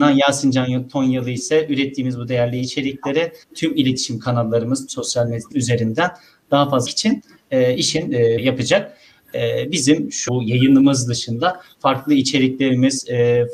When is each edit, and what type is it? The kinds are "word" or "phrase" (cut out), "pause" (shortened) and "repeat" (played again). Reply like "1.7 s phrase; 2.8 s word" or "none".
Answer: 3.4 s pause; 4.9 s word; 5.5 s word; 6.9 s phrase; 8.4 s word; 10.3 s word